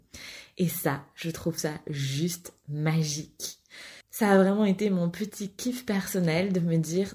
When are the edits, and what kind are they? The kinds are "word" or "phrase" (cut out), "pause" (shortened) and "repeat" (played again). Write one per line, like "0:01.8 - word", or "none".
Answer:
0:04.0 - pause